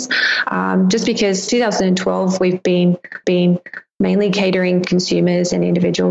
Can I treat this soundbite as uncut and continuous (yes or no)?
no